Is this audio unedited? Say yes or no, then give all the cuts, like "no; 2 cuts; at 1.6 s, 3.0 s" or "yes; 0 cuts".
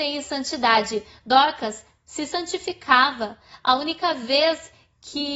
yes; 0 cuts